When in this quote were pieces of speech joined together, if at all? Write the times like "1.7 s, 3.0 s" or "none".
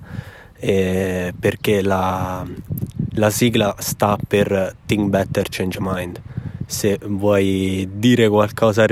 none

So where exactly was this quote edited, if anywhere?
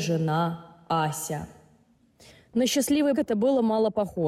3.1 s

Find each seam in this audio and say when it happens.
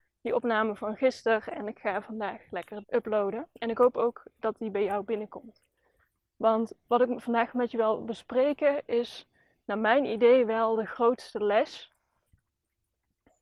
2.8 s, 3.5 s, 6.8 s

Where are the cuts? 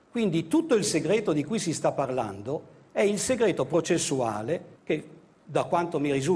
4.8 s

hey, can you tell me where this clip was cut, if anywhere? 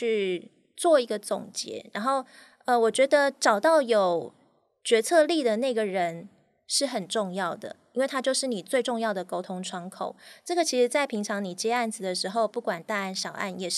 none

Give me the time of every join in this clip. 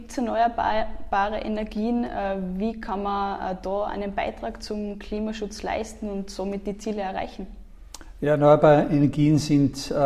none

